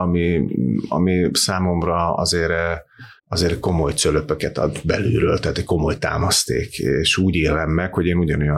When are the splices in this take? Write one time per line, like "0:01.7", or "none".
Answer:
0:03.2